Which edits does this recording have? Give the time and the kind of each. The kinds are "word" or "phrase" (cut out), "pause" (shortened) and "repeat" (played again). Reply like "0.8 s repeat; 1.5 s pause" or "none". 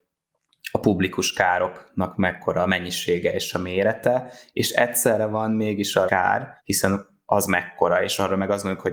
6.1 s phrase; 6.6 s pause